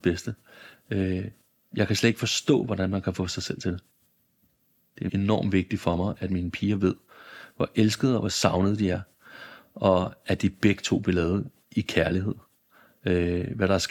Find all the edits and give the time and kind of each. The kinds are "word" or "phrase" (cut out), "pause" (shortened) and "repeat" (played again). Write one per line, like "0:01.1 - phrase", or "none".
0:05.1 - word